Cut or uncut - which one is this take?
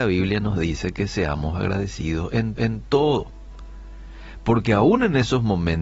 cut